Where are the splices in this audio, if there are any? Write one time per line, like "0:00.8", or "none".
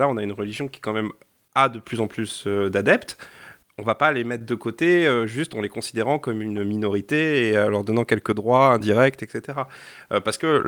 none